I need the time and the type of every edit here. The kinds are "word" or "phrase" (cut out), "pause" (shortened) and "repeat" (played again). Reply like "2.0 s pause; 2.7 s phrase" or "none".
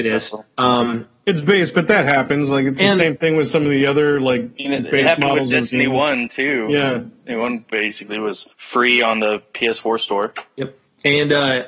8.5 s pause